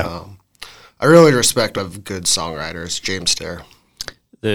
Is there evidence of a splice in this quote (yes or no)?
yes